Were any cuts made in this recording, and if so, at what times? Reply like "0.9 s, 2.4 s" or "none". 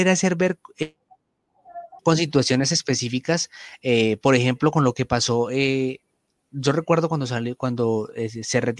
2.0 s